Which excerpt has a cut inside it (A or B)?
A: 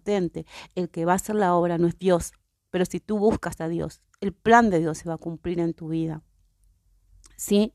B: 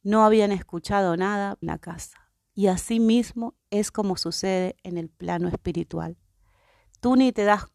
B